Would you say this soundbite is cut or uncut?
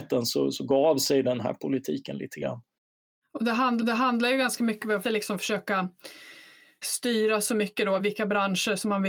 cut